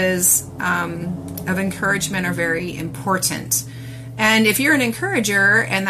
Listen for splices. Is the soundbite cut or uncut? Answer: uncut